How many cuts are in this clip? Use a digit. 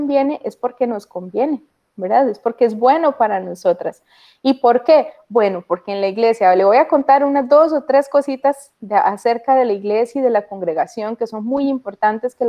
0